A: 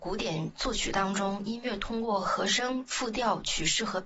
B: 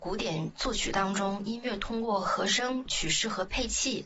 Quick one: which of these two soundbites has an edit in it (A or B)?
B